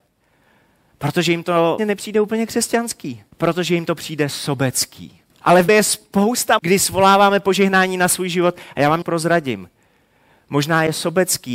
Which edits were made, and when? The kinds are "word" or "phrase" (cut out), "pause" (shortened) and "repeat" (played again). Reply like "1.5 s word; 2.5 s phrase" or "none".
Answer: 1.8 s word; 3.3 s pause; 5.3 s pause; 5.7 s word; 6.6 s word; 9.0 s word